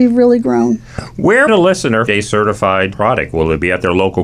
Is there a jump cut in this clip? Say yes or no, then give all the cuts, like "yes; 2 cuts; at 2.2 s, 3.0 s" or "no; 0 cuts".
yes; 3 cuts; at 1.5 s, 2.1 s, 2.9 s